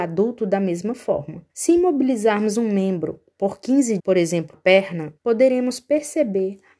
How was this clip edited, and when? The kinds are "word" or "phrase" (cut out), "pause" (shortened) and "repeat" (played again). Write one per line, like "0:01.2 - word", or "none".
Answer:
0:01.5 - pause
0:02.5 - word
0:04.0 - word
0:04.5 - word
0:05.2 - pause